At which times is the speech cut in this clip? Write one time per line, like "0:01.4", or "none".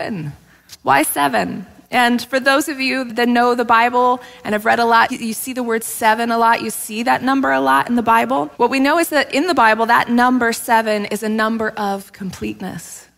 0:03.1
0:05.1
0:08.5